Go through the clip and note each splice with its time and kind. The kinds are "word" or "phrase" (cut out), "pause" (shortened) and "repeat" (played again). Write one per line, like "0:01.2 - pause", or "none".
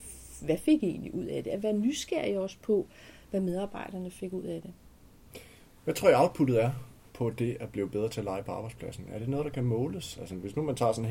0:07.0 - pause